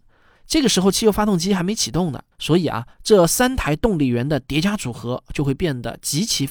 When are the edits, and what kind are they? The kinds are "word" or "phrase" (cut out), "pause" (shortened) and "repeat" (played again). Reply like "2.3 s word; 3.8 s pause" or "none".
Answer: 2.3 s pause; 2.9 s pause